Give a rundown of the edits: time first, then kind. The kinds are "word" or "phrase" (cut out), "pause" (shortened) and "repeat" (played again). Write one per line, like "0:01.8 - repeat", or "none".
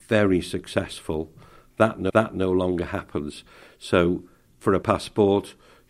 0:02.1 - repeat
0:04.8 - word